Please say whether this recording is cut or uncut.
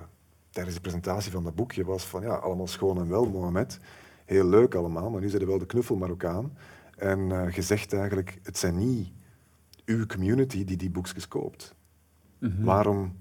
uncut